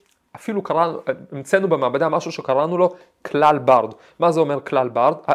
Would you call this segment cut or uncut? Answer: uncut